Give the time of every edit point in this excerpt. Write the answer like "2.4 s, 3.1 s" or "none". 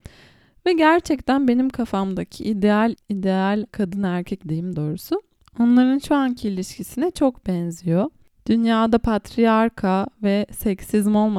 3.0 s, 3.7 s, 4.4 s, 4.7 s